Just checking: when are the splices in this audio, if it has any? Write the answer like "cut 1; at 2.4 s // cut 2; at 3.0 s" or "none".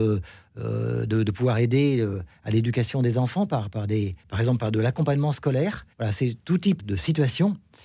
cut 1; at 4.2 s // cut 2; at 5.9 s // cut 3; at 6.8 s